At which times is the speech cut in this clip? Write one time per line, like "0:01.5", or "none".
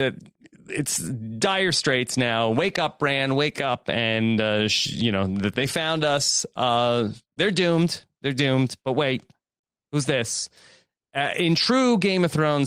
none